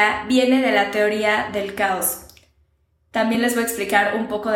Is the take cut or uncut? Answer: uncut